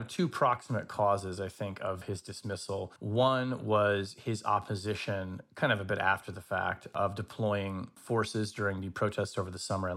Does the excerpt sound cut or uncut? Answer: uncut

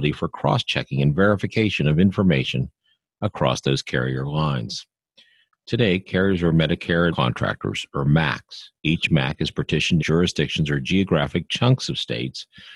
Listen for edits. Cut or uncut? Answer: cut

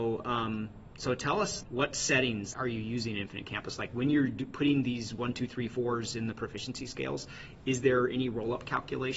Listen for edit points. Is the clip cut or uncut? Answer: cut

